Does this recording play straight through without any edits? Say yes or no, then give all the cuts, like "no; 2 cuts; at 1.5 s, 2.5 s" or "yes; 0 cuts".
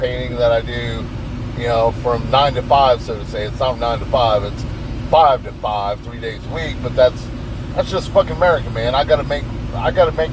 no; 1 cut; at 3.7 s